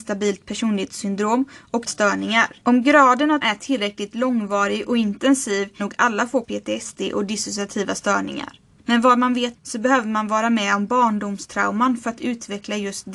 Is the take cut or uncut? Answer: cut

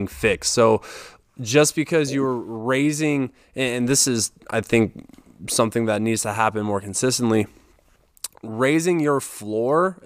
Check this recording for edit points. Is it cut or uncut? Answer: uncut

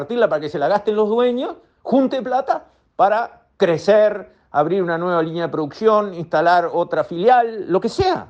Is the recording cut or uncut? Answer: uncut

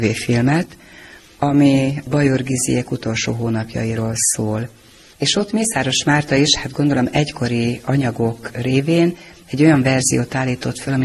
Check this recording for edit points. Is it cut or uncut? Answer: uncut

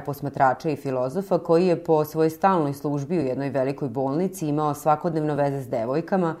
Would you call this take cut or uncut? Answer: uncut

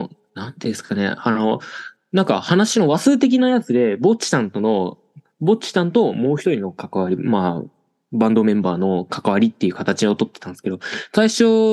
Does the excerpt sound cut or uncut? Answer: uncut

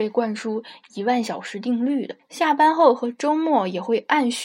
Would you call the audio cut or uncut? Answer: cut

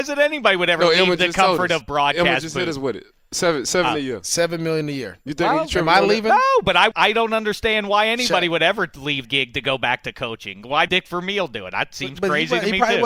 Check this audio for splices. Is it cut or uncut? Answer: cut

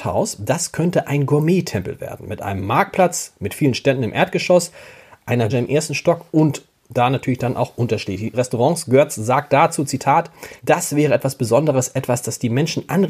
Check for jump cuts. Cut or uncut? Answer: cut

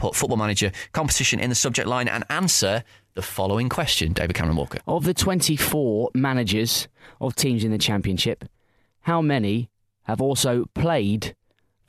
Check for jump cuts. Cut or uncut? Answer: uncut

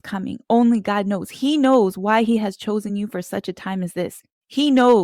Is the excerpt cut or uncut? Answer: uncut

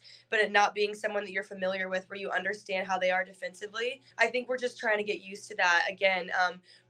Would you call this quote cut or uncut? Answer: cut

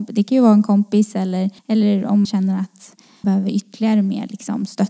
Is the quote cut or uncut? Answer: cut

